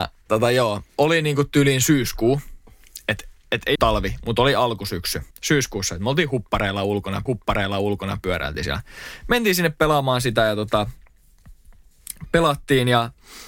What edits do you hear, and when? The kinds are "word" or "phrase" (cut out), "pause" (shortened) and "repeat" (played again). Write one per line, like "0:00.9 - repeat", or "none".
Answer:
0:03.8 - phrase
0:05.3 - pause
0:07.3 - repeat